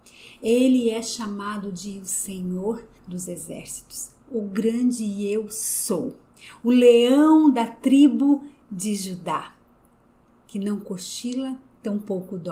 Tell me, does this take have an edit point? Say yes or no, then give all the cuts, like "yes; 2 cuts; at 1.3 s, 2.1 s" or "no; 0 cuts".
yes; 1 cut; at 3.0 s